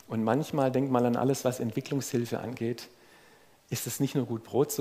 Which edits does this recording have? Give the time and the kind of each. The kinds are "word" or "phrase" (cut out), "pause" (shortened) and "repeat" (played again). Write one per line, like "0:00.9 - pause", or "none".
none

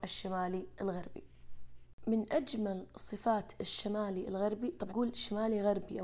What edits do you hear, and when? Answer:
0:04.9 - word

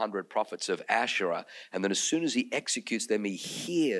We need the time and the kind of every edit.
none

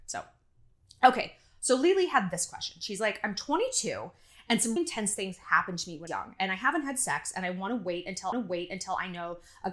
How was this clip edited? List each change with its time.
0:04.8 - word
0:06.1 - phrase
0:08.3 - repeat

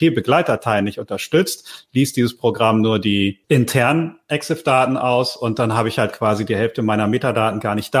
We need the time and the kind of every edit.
0:03.4 - pause

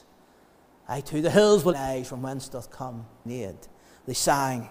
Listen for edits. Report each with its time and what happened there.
0:01.7 - phrase
0:03.3 - word

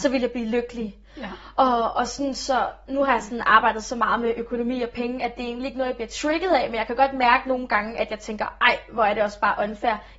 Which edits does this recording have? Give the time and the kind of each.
none

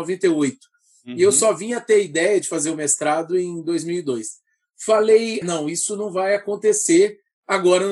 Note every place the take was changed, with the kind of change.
0:05.4 - word

